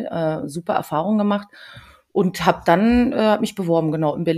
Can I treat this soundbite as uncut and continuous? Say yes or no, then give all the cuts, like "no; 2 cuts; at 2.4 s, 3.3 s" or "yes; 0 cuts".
yes; 0 cuts